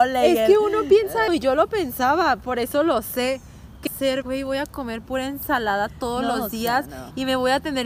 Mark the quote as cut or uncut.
cut